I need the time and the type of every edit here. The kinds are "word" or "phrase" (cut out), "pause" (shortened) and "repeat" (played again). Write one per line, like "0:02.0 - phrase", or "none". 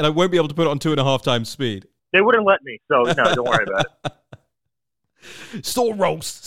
0:02.0 - pause